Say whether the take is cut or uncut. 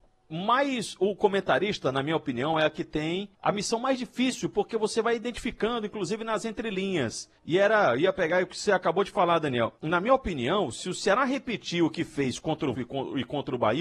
cut